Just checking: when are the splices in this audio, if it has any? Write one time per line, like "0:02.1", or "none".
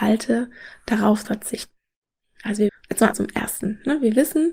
0:01.2
0:02.7
0:03.1